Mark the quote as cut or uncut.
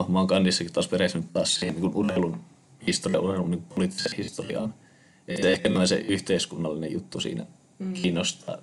uncut